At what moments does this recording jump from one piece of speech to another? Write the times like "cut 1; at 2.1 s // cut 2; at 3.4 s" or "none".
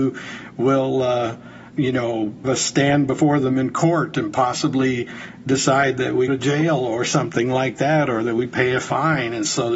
cut 1; at 1.7 s // cut 2; at 2.4 s // cut 3; at 6.3 s

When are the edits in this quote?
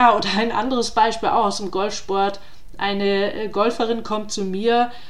none

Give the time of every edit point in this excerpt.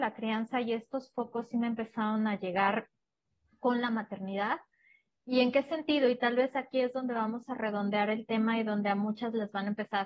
none

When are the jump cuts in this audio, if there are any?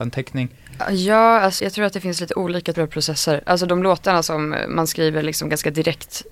cut 1; at 1.6 s // cut 2; at 2.7 s

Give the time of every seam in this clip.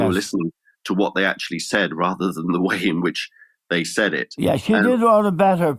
none

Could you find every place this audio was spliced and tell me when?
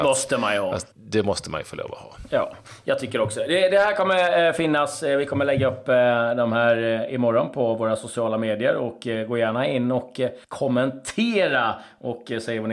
cut 1; at 0.9 s // cut 2; at 10.4 s

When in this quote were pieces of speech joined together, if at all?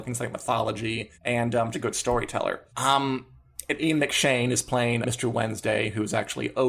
cut 1; at 1.1 s // cut 2; at 1.7 s // cut 3; at 2.7 s // cut 4; at 5.0 s

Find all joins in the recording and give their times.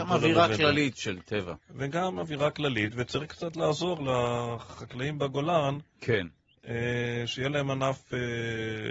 none

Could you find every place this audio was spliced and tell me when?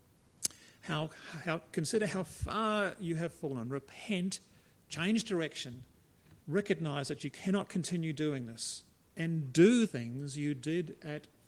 cut 1; at 6.4 s // cut 2; at 9.0 s // cut 3; at 9.9 s

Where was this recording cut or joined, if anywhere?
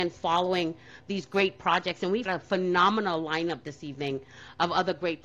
cut 1; at 2.3 s

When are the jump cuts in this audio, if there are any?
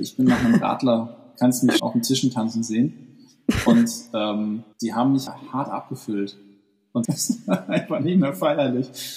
cut 1; at 1.8 s // cut 2; at 4.7 s // cut 3; at 5.3 s // cut 4; at 7.0 s

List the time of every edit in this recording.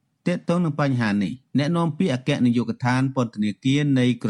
none

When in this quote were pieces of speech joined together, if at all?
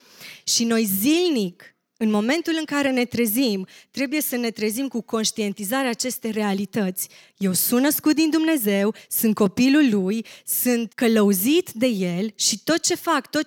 cut 1; at 10.9 s

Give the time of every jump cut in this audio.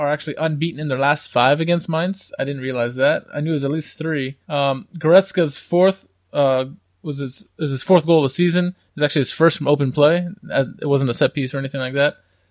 cut 1; at 4.4 s

